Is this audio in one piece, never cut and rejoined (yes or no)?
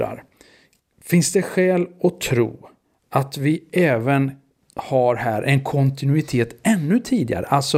yes